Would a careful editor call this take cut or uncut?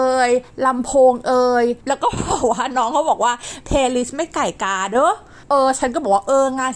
cut